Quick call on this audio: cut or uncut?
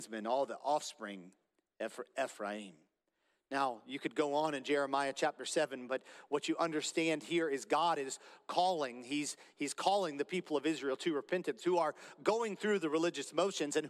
uncut